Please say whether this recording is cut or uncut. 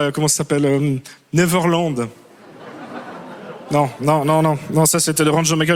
uncut